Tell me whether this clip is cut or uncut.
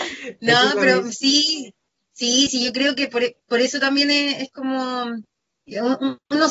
uncut